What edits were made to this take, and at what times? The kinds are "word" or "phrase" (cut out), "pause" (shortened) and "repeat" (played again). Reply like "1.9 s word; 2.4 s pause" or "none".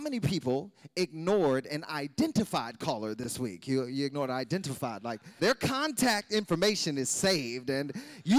5.4 s word